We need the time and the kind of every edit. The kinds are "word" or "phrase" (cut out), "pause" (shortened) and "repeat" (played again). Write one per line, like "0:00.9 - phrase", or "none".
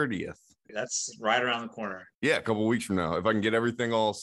0:02.1 - pause